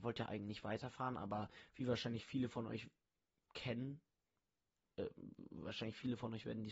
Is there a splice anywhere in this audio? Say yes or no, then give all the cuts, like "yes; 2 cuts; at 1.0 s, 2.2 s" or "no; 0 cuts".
no; 0 cuts